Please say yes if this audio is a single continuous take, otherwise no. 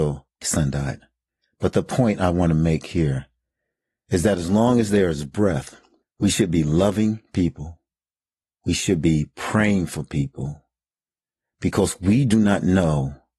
yes